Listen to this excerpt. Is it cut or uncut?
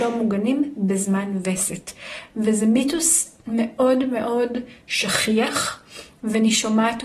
uncut